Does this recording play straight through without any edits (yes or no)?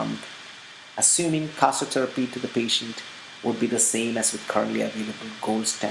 yes